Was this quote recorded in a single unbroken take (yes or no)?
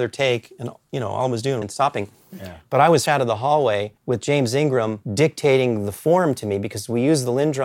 no